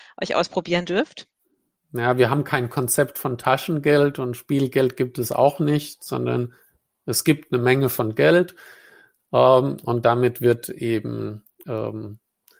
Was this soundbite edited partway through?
no; 0 cuts

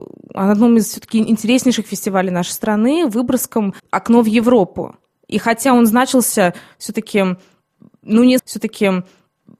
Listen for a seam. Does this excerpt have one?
yes; 3 cuts; at 3.8 s, 5.1 s, 8.4 s

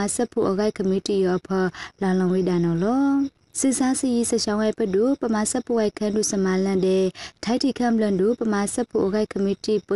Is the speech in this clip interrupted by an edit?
no; 0 cuts

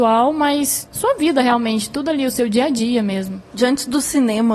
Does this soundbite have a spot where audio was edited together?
yes; 1 cut; at 3.5 s

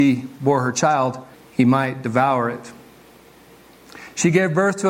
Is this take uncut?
no; 1 cut; at 1.3 s

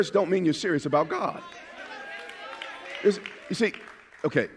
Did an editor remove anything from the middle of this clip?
yes; 1 cut; at 3.4 s

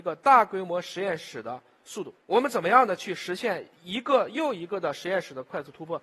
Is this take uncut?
no; 2 cuts; at 2.2 s, 3.7 s

